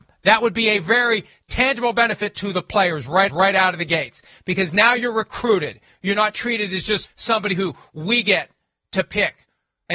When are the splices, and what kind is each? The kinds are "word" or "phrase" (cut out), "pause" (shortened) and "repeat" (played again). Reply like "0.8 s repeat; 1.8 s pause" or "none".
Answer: 3.3 s repeat; 7.1 s word